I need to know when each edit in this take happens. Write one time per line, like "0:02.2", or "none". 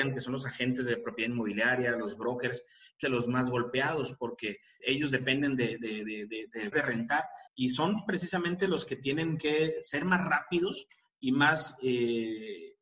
0:03.0
0:04.8
0:06.7
0:07.5

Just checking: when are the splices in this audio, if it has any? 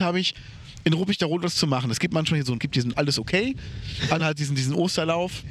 0:02.6
0:02.9
0:04.2

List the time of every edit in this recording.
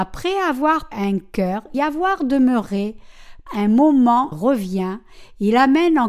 0:00.9
0:01.7
0:03.5
0:04.3

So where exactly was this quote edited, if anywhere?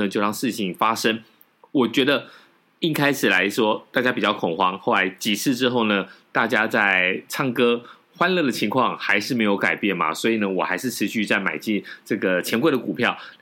none

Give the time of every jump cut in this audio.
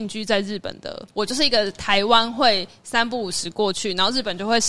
0:01.1

